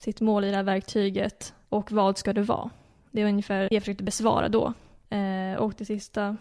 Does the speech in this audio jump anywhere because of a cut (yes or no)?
yes